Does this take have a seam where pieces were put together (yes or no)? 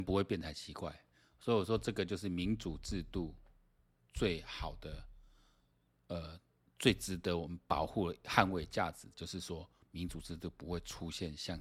no